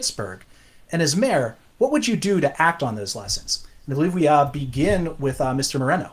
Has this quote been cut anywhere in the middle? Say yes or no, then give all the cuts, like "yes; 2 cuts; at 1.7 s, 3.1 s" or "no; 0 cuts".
no; 0 cuts